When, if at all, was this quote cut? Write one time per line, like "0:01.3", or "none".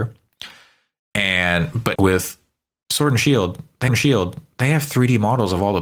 0:01.9
0:03.9